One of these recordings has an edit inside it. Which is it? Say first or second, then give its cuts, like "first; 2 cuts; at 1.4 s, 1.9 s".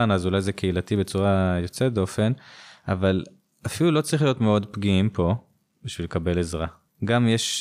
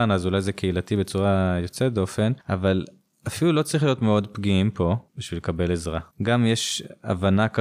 second; 3 cuts; at 2.4 s, 5.1 s, 6.1 s